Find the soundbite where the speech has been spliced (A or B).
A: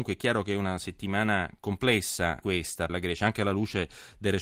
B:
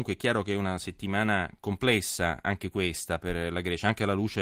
A